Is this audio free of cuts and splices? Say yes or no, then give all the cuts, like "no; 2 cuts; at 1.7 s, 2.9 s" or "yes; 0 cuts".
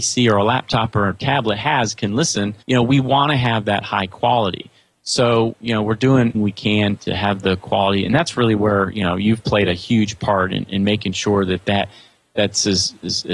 no; 3 cuts; at 2.6 s, 6.3 s, 7.0 s